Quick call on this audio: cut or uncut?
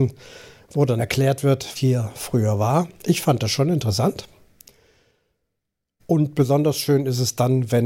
cut